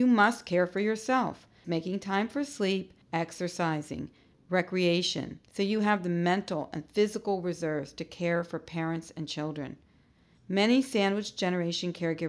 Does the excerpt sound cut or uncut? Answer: cut